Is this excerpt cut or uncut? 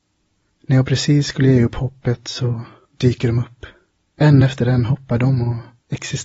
uncut